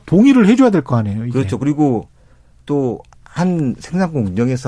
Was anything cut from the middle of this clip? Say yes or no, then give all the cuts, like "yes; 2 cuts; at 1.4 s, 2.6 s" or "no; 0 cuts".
yes; 1 cut; at 3.1 s